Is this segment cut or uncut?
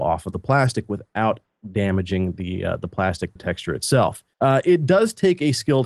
cut